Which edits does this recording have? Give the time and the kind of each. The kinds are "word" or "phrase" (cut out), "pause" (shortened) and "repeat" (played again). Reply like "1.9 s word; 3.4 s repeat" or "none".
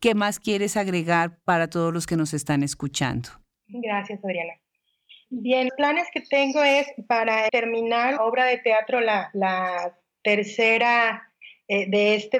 5.7 s word; 7.5 s word; 8.2 s word

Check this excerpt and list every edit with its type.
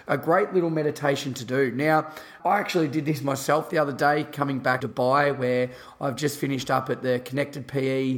2.4 s word; 4.8 s phrase

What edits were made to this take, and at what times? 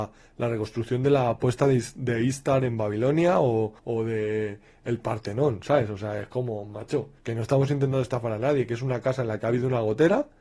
3.8 s pause; 7.2 s pause

